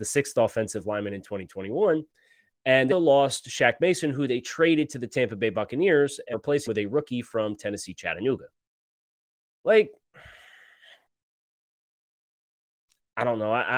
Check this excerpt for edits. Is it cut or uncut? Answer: cut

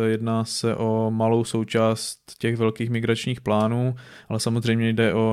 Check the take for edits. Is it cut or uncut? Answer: uncut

